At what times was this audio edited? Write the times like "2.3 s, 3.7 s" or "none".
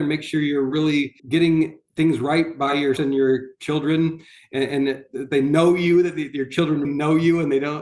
1.2 s, 3.0 s, 6.8 s